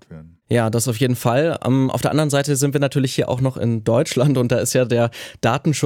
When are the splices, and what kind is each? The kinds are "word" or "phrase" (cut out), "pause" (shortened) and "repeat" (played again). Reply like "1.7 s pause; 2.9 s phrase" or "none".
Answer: none